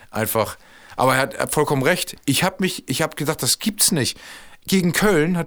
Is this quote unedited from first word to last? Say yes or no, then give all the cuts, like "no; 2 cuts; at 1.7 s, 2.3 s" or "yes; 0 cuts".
yes; 0 cuts